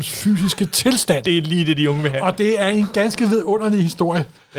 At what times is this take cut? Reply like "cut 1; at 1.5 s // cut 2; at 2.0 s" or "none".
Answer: none